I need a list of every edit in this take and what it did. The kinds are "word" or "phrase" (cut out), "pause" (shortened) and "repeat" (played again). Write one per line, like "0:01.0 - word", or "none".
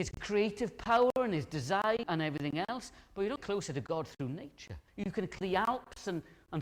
0:02.0 - word
0:03.4 - word
0:04.9 - pause
0:05.4 - word